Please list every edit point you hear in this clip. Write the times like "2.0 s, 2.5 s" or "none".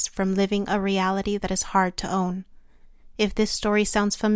none